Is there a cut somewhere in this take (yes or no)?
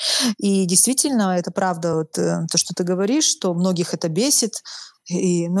no